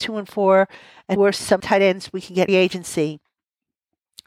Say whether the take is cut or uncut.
cut